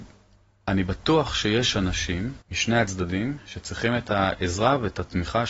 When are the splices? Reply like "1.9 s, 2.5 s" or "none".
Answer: 2.4 s

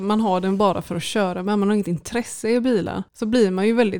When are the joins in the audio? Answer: 3.1 s

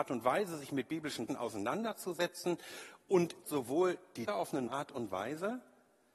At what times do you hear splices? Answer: 1.3 s, 3.4 s, 4.3 s, 4.7 s

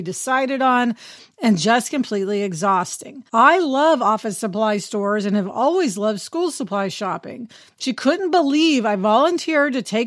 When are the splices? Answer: 3.3 s

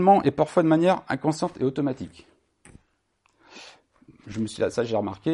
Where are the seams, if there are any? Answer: none

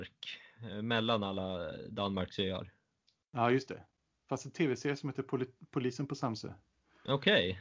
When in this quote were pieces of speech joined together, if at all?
none

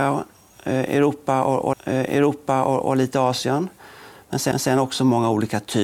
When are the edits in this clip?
1.7 s, 4.5 s

